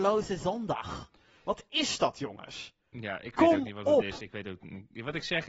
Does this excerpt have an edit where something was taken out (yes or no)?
no